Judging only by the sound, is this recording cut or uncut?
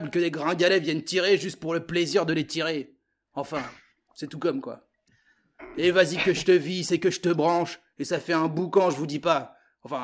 uncut